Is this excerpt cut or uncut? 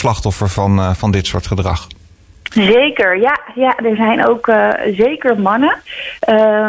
uncut